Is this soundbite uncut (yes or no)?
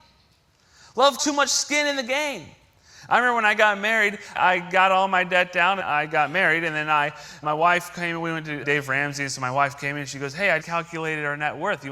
no